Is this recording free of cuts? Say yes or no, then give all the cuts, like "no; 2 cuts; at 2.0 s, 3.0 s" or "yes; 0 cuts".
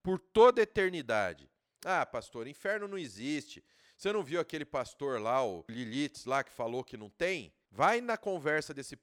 yes; 0 cuts